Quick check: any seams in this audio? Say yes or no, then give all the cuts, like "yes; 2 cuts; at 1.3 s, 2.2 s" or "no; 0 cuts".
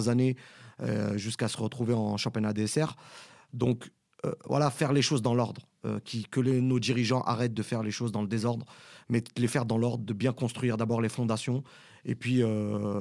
no; 0 cuts